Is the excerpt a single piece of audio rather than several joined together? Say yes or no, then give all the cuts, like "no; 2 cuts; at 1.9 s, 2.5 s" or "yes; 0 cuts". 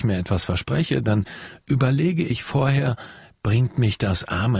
yes; 0 cuts